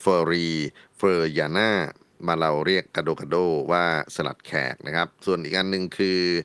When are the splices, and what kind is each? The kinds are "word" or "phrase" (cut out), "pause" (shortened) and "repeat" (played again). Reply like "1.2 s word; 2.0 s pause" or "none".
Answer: none